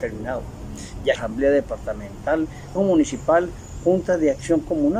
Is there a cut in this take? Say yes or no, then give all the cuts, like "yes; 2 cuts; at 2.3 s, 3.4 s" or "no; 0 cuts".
yes; 2 cuts; at 1.2 s, 2.8 s